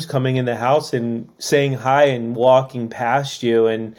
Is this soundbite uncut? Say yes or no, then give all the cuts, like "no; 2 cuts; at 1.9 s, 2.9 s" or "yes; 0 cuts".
yes; 0 cuts